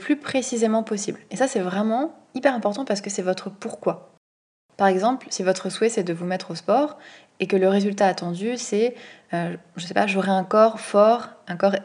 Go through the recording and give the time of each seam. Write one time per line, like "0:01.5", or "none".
none